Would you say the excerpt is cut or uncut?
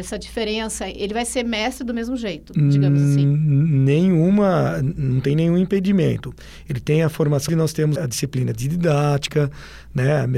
cut